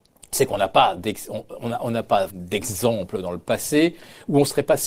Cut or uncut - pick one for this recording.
cut